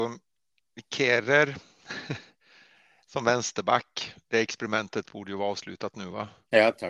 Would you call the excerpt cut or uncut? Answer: uncut